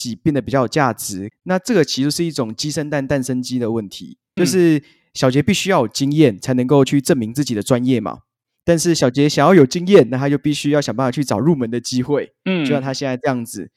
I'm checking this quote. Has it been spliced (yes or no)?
yes